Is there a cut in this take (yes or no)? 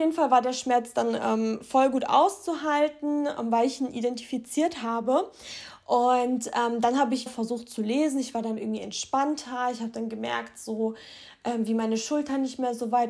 yes